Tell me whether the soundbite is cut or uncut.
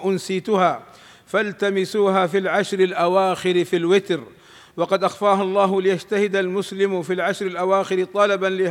uncut